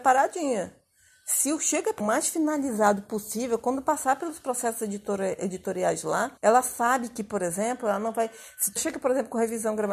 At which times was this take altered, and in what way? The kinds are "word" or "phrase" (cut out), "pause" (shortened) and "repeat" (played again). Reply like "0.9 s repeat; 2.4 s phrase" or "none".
2.0 s phrase; 6.4 s pause; 8.8 s word

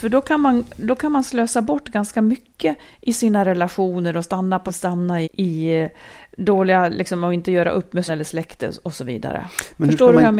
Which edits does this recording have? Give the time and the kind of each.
4.7 s phrase; 5.2 s word; 8.1 s word

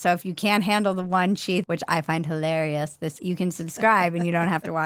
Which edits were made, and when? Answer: 1.6 s word; 3.2 s word

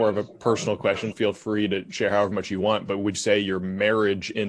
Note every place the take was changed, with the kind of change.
1.1 s word; 3.1 s word

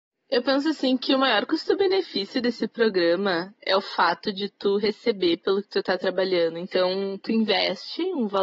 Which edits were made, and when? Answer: none

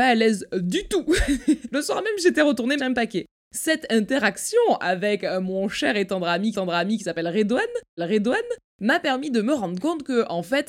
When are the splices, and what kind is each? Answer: 2.8 s word; 6.5 s repeat; 8.0 s repeat

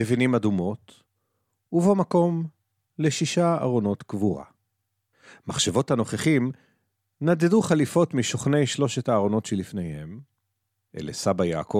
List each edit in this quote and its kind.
none

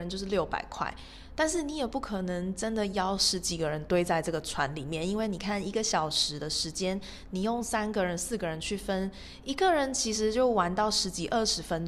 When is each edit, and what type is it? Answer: none

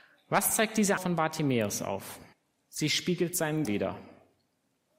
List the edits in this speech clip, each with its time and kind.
1.0 s word; 2.3 s pause; 3.6 s word

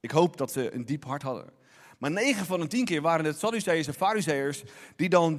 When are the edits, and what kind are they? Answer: none

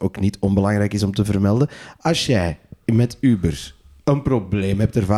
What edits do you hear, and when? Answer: none

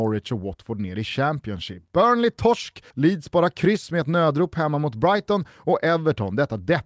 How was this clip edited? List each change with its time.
2.9 s pause

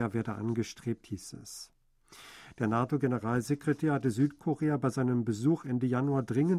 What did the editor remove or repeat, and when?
none

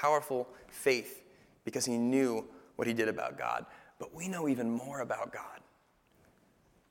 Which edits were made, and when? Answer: none

